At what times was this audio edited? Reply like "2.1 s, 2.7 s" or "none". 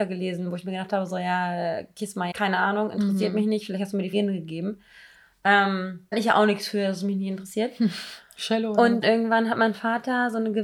2.3 s, 4.1 s, 6.1 s, 9.0 s